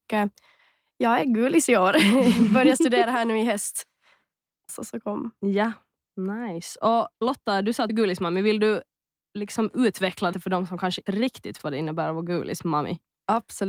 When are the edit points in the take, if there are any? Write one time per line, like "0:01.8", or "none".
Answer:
0:04.7
0:07.2
0:07.9
0:10.3
0:11.1
0:11.6

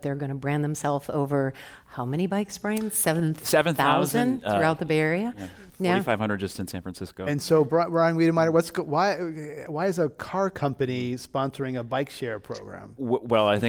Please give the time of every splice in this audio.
0:05.7

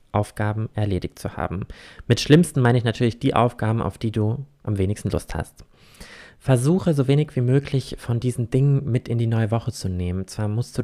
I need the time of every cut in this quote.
none

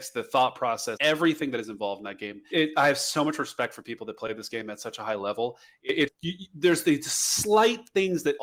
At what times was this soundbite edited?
0:01.0
0:02.5
0:06.1

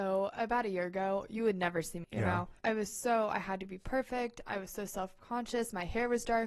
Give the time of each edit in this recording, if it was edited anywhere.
0:02.0
0:02.6

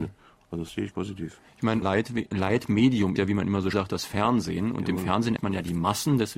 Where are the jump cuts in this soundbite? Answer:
0:00.9
0:01.8
0:03.2
0:03.7
0:05.4

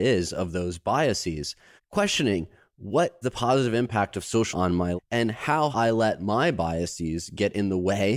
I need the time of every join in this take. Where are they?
0:01.8
0:03.2
0:04.5
0:05.0
0:05.7

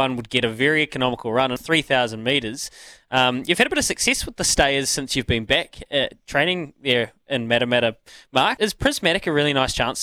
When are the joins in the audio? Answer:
0:01.6
0:08.6

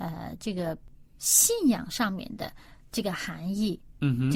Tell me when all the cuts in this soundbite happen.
none

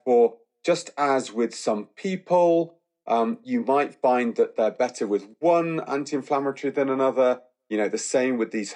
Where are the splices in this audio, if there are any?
none

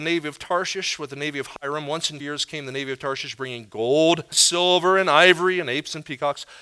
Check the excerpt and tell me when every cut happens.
0:02.2
0:04.3

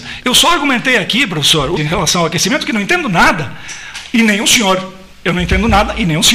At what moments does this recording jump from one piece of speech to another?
0:01.8

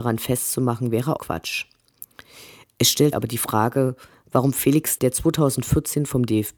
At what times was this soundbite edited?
0:01.2
0:03.1
0:05.0

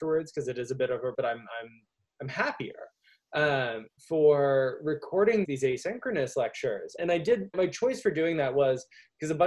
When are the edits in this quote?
0:01.1
0:04.0
0:05.4
0:07.0
0:07.5

